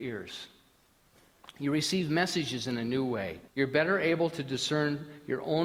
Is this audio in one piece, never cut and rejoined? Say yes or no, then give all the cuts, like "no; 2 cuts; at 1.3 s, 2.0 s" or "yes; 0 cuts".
no; 1 cut; at 3.5 s